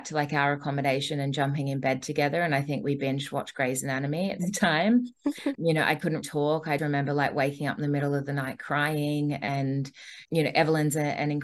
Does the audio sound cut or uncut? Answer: cut